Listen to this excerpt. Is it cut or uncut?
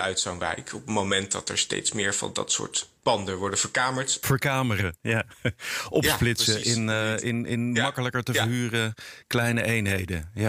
cut